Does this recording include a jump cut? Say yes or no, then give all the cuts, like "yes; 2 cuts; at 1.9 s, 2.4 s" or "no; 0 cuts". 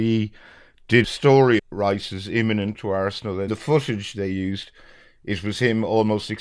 yes; 4 cuts; at 1.0 s, 1.6 s, 2.7 s, 3.5 s